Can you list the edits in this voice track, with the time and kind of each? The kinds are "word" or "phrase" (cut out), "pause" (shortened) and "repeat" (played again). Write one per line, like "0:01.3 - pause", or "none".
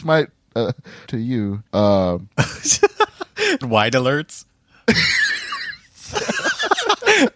0:01.1 - word
0:01.7 - pause
0:03.6 - word

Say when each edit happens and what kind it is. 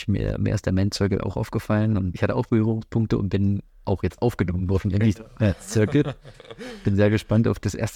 0:02.1 - word

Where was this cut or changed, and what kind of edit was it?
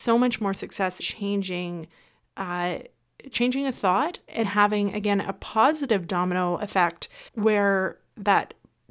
0:01.0 - word
0:03.3 - word
0:04.4 - word
0:07.3 - pause

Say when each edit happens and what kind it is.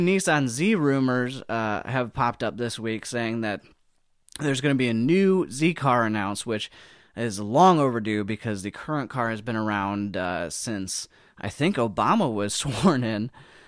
none

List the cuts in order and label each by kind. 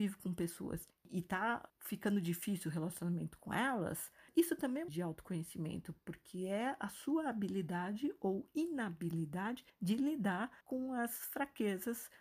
0:04.9 - word
0:10.6 - pause

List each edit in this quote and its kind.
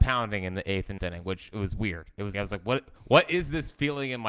0:01.0 - word
0:02.3 - word
0:03.0 - pause

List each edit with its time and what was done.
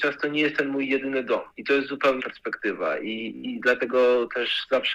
0:01.5 - pause
0:02.2 - word

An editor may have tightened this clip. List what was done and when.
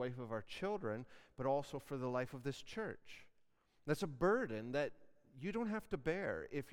none

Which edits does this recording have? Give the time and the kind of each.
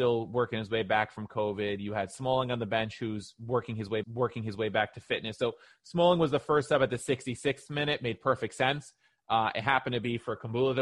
0:04.0 - repeat

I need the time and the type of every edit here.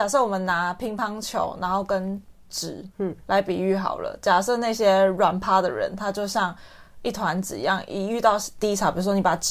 0:02.9 - pause

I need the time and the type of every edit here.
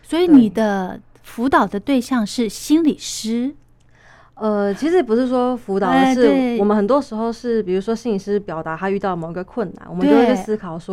none

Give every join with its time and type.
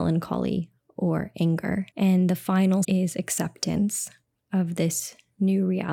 0:01.9 - pause
0:02.8 - word

